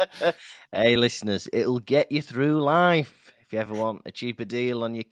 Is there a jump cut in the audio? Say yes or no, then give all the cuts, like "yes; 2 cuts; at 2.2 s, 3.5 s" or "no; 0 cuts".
no; 0 cuts